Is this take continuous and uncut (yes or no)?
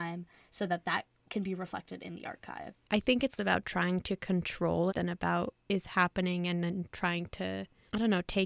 no